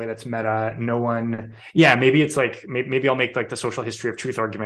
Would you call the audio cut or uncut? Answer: uncut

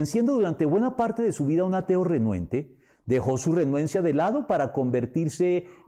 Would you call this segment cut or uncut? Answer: uncut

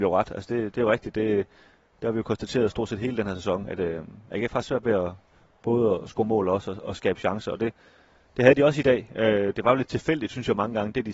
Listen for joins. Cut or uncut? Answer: uncut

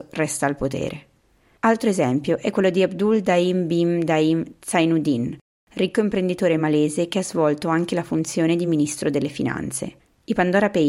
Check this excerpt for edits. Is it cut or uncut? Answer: uncut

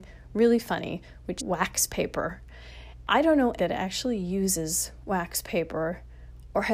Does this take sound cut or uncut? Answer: cut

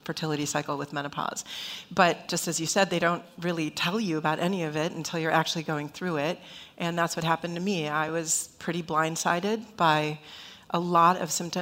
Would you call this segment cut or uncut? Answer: uncut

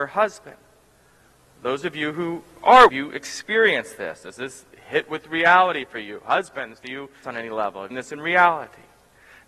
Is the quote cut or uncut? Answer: cut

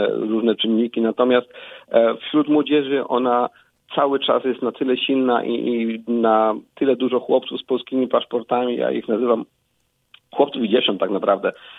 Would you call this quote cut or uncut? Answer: uncut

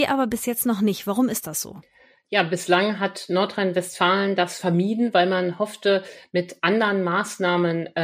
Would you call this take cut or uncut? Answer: uncut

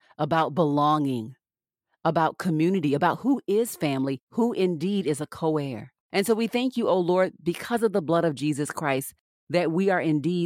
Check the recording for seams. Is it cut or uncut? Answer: uncut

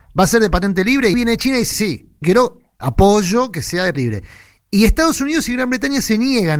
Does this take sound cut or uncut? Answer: cut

